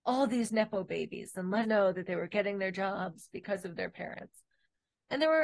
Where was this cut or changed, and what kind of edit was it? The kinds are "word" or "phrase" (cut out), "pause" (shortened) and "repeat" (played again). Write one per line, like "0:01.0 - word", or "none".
0:01.6 - word